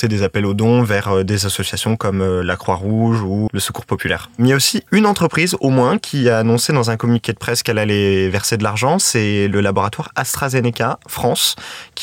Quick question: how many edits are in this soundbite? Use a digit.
2